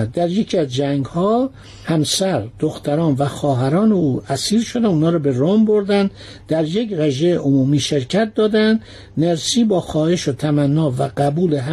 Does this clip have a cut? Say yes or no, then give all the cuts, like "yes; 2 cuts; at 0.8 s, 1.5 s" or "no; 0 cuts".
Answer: no; 0 cuts